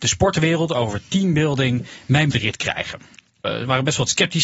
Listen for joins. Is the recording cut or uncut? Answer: cut